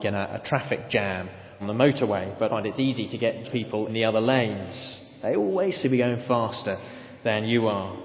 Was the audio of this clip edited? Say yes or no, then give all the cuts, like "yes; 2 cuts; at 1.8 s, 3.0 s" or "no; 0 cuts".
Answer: yes; 5 cuts; at 1.6 s, 2.5 s, 3.4 s, 3.9 s, 5.8 s